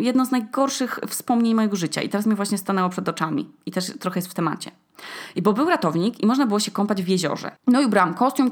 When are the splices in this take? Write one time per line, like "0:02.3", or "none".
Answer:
0:07.6